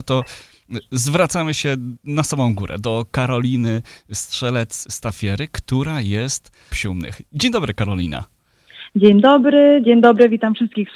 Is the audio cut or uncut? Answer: cut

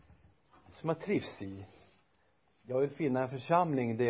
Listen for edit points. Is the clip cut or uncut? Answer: uncut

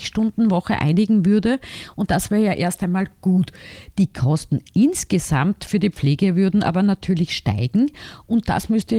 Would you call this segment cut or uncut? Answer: uncut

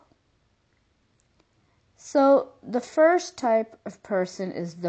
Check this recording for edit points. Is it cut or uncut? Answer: uncut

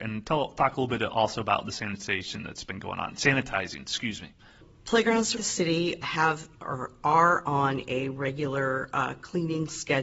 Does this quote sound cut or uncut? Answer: cut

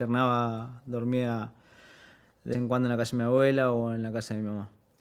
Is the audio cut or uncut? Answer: cut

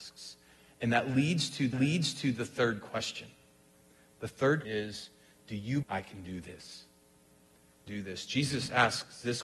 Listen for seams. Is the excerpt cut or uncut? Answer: cut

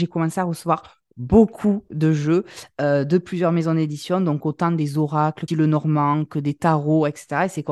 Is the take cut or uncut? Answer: cut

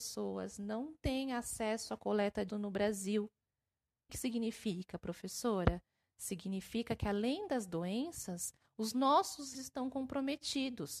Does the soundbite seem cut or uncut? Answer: cut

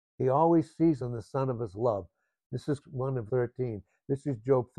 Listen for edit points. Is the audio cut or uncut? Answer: cut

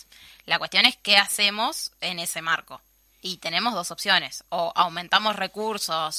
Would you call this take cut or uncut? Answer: uncut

